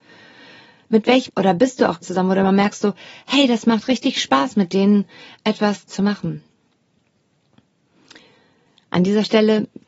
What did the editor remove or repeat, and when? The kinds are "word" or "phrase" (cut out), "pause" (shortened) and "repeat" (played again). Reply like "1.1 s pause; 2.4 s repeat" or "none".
1.3 s phrase; 2.0 s word; 5.9 s word